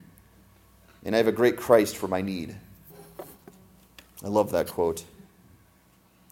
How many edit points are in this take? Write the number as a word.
zero